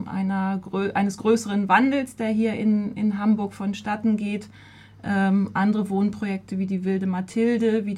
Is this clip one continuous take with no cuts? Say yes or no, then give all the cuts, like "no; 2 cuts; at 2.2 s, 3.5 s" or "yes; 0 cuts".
yes; 0 cuts